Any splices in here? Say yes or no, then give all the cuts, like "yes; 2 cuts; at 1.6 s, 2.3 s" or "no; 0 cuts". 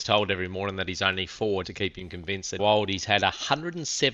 yes; 2 cuts; at 1.6 s, 2.6 s